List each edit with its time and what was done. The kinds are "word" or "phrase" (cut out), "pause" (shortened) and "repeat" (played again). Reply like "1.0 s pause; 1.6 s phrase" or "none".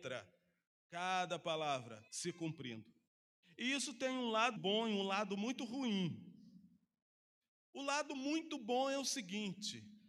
2.1 s pause; 3.1 s pause; 4.6 s word

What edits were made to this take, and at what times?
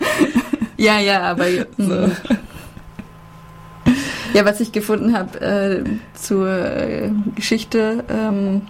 none

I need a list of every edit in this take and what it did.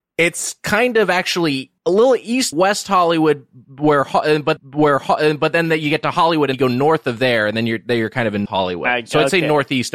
1.8 s pause; 2.5 s word; 4.6 s repeat; 6.5 s word; 8.5 s word

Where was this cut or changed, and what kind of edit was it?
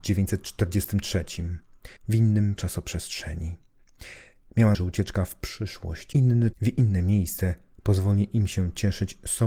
2.0 s pause; 2.6 s word; 4.7 s word; 6.1 s word; 6.5 s phrase

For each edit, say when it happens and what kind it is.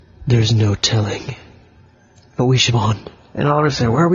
2.7 s word

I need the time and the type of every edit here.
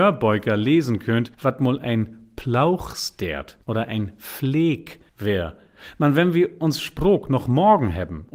1.3 s pause; 3.6 s pause; 5.1 s pause

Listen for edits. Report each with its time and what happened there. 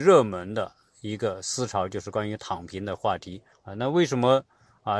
3.5 s pause

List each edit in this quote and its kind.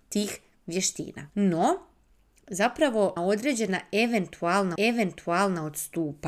1.3 s pause; 3.2 s word; 4.8 s repeat

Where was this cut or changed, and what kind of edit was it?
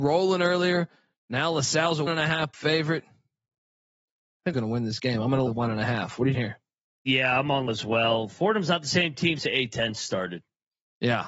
2.1 s word; 2.5 s word; 4.5 s word; 5.5 s word; 6.3 s word; 7.7 s word; 9.4 s word

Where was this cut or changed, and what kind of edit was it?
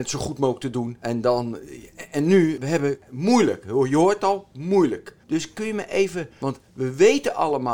5.2 s pause

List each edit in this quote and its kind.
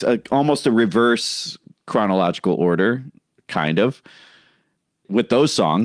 none

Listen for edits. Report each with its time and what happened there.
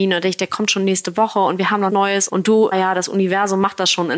1.9 s word; 2.3 s word; 2.7 s word

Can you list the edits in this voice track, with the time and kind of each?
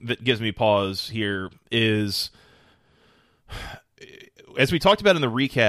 none

